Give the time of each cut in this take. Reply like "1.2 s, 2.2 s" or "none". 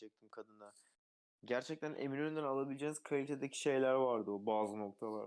none